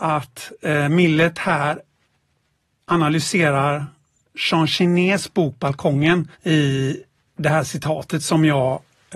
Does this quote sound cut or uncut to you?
cut